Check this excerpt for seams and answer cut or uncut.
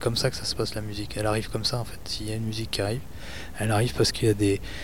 uncut